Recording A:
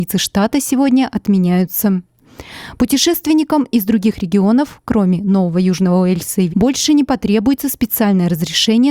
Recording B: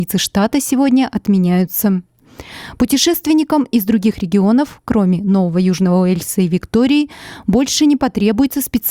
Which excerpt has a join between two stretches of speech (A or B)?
A